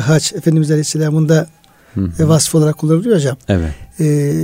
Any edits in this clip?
no; 0 cuts

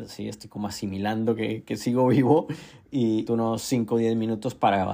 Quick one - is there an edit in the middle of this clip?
yes; 1 cut; at 3.3 s

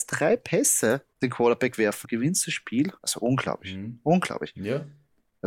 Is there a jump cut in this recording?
yes; 3 cuts; at 1.1 s, 2.0 s, 3.0 s

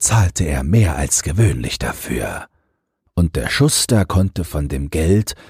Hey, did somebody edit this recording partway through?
no; 0 cuts

